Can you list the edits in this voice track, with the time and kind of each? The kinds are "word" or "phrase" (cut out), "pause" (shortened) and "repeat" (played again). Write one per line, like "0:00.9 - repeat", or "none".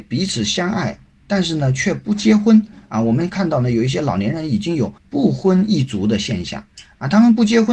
0:05.0 - pause